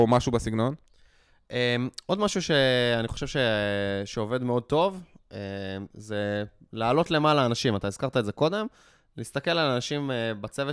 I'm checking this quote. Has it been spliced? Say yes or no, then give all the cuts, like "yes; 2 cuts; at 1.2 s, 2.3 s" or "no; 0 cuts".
no; 0 cuts